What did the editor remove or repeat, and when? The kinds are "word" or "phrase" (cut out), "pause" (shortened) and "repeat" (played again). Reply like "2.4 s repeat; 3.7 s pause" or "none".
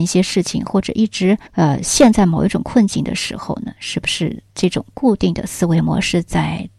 1.5 s pause